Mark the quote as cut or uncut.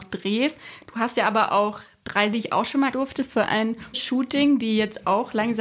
cut